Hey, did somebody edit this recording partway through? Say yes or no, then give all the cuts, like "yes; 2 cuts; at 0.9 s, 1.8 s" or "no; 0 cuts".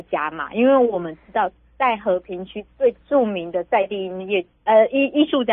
no; 0 cuts